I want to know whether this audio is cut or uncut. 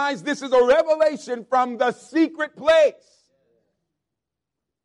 uncut